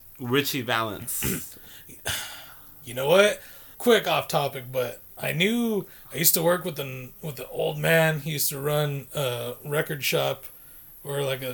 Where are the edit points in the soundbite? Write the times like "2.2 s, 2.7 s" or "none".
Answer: 3.7 s